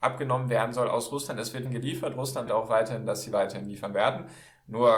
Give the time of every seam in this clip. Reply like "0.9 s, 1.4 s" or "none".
1.7 s, 2.5 s